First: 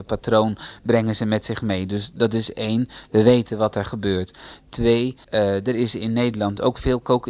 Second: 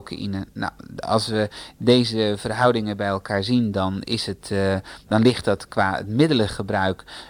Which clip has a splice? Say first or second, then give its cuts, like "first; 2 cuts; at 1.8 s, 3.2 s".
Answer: first; 1 cut; at 5.2 s